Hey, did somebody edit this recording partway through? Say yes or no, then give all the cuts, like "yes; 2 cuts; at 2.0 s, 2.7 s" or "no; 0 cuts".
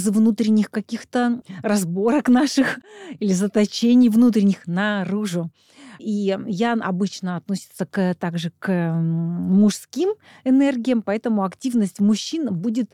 no; 0 cuts